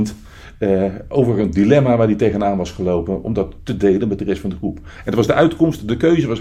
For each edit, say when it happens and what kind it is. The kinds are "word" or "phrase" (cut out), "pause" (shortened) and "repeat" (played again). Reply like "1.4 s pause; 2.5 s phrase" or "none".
none